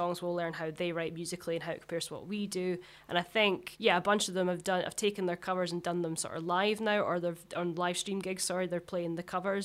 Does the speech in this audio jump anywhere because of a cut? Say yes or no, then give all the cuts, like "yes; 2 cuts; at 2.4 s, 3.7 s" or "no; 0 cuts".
no; 0 cuts